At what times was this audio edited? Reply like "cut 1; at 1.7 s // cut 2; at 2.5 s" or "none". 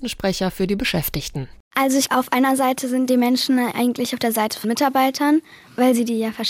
cut 1; at 2.1 s // cut 2; at 3.7 s // cut 3; at 4.6 s